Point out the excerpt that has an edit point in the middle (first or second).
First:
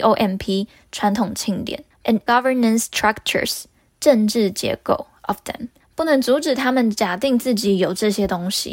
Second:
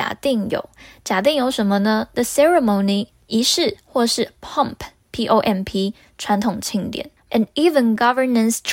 first